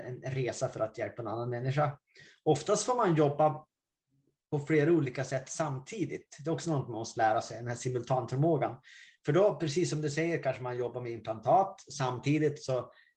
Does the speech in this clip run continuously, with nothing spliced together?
yes; 0 cuts

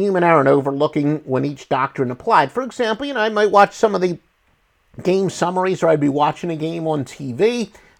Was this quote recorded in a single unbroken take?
yes; 0 cuts

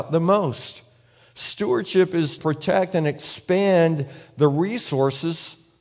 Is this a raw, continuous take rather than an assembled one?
no; 1 cut; at 2.4 s

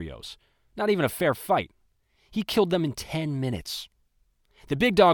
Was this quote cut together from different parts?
no; 0 cuts

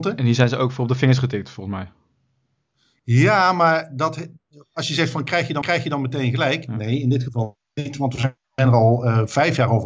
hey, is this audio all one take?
no; 2 cuts; at 5.6 s, 8.4 s

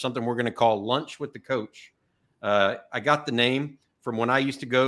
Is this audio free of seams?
yes; 0 cuts

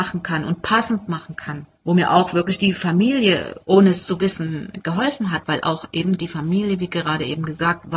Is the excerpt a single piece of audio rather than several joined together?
no; 2 cuts; at 1.7 s, 3.6 s

